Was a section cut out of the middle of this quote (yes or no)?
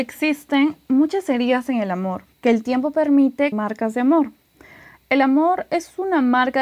yes